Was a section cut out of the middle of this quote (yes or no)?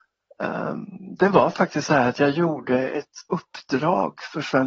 no